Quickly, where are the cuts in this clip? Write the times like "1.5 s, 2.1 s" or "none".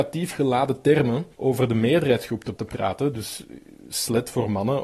1.3 s, 2.5 s